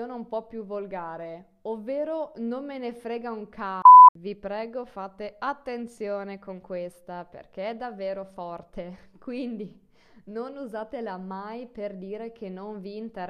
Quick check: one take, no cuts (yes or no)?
yes